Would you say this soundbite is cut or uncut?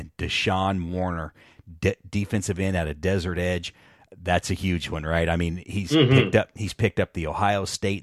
uncut